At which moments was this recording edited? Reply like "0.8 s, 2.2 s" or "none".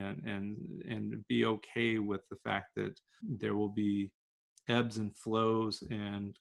3.2 s